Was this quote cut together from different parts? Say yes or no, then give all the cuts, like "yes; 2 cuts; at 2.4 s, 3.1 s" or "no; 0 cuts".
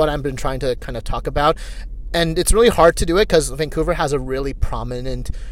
no; 0 cuts